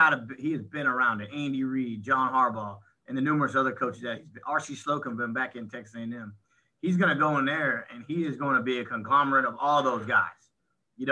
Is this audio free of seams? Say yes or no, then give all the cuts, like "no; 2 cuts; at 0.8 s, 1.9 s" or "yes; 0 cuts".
yes; 0 cuts